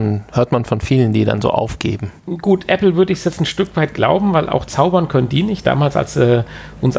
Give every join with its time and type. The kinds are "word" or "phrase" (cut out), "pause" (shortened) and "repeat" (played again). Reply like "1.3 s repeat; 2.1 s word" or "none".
2.2 s pause